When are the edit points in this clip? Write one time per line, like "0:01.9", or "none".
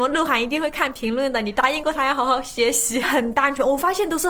0:03.0

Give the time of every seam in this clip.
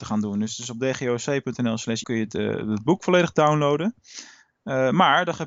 0:02.0

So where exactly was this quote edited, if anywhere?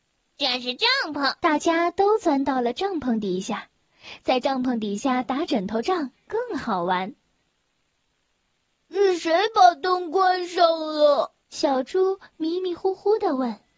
0:01.4
0:11.4

